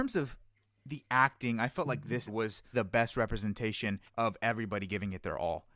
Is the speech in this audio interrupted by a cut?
yes; 3 cuts; at 2.3 s, 2.7 s, 4.1 s

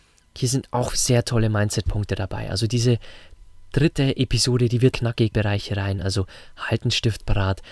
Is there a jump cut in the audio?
yes; 2 cuts; at 4.9 s, 5.3 s

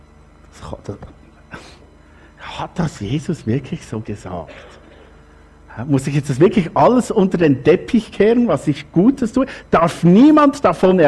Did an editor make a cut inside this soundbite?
no; 0 cuts

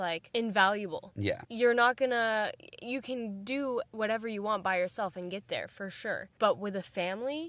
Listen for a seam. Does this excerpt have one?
no; 0 cuts

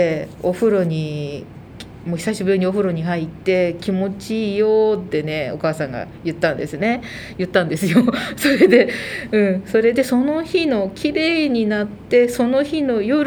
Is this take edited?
no; 0 cuts

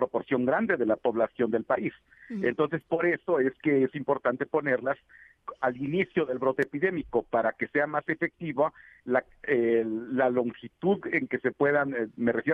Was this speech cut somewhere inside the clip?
no; 0 cuts

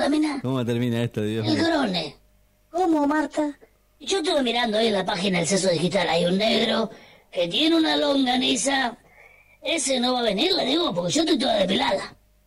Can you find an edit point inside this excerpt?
no; 0 cuts

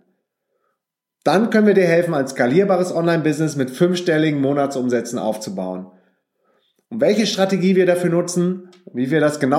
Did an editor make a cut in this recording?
no; 0 cuts

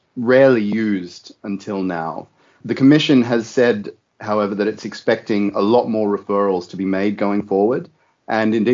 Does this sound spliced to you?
no; 0 cuts

